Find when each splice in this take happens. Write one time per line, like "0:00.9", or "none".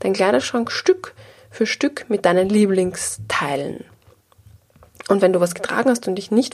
none